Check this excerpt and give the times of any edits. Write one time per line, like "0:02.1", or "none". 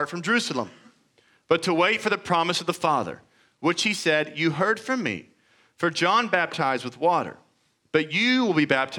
none